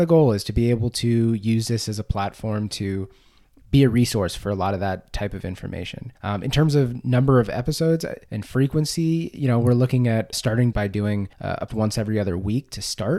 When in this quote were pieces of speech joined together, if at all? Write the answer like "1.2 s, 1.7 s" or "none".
3.6 s, 6.2 s, 8.3 s, 10.3 s, 10.7 s, 11.3 s, 11.7 s